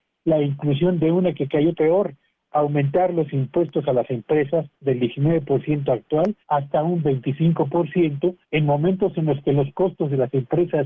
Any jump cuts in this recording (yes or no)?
yes